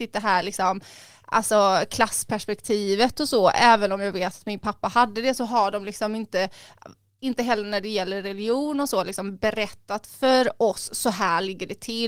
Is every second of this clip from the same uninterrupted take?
yes; 0 cuts

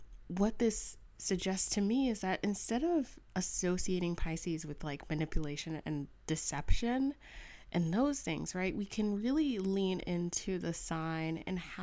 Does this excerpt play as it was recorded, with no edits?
yes; 0 cuts

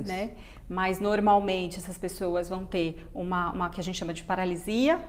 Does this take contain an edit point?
no; 0 cuts

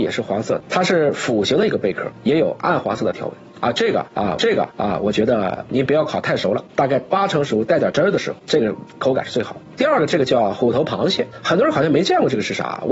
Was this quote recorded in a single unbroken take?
no; 1 cut; at 4.4 s

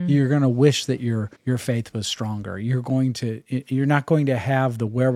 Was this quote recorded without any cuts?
no; 1 cut; at 1.3 s

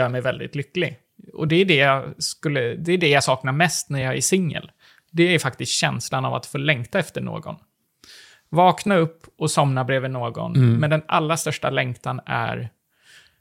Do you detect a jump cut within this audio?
no; 0 cuts

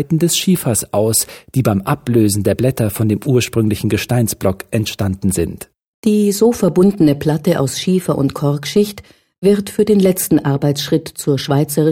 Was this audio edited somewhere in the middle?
no; 0 cuts

